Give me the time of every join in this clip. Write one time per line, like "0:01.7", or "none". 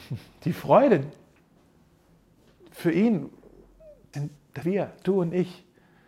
0:04.1
0:04.6